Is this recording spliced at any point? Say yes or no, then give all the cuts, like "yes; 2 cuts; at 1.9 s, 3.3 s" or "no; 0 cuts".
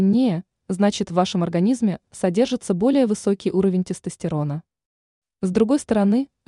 no; 0 cuts